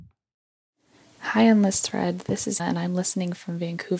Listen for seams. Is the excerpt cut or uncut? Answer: cut